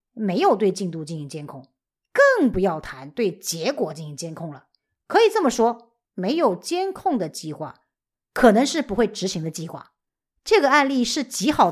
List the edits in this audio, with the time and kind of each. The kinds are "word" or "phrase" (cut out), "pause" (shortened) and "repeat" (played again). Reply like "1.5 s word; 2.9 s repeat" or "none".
6.0 s pause